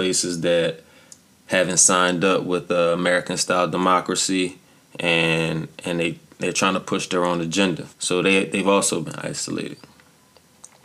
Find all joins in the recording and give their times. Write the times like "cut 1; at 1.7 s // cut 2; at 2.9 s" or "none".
cut 1; at 7.9 s